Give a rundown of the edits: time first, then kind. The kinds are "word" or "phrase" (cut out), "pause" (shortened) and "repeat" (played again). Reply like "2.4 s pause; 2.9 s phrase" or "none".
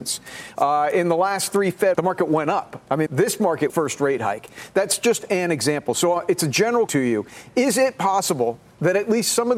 1.9 s phrase; 3.1 s word; 3.7 s phrase; 6.9 s word